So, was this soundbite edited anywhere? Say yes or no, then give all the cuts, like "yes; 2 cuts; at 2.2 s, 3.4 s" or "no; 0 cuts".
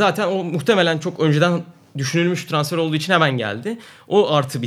no; 0 cuts